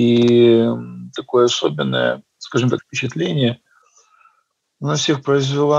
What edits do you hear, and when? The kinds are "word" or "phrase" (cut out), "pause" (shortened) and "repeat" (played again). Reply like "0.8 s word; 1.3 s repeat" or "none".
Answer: 2.3 s pause; 2.8 s phrase